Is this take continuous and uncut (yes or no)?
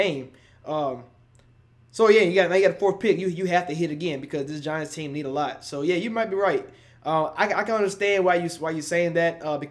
yes